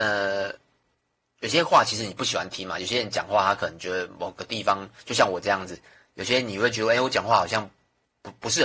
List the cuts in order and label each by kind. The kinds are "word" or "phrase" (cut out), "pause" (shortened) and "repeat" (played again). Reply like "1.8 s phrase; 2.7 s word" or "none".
none